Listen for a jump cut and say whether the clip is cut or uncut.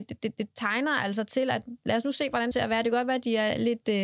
cut